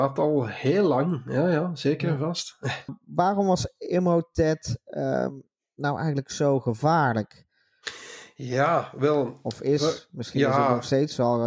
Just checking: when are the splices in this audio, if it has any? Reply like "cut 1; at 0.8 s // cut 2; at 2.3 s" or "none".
none